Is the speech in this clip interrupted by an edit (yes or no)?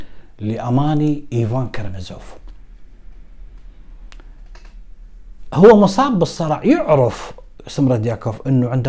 no